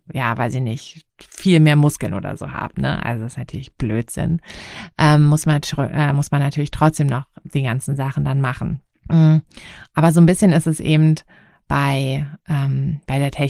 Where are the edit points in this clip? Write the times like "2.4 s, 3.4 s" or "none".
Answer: 1.1 s, 8.9 s